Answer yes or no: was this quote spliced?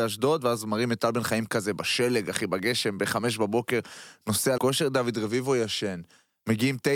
yes